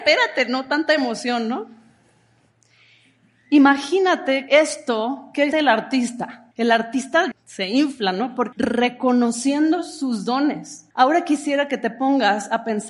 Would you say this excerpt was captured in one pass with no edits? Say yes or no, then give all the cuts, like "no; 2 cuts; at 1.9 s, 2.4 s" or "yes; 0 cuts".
no; 6 cuts; at 4.5 s, 5.5 s, 6.5 s, 7.3 s, 8.5 s, 10.9 s